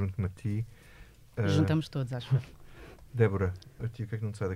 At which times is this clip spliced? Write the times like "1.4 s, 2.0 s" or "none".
none

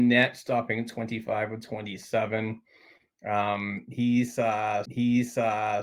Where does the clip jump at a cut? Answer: 4.8 s

